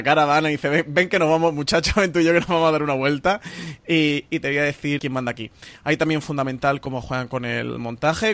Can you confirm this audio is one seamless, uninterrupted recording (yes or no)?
no